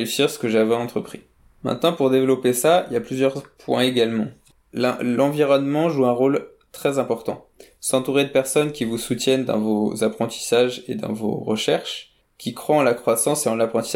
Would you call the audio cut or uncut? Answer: uncut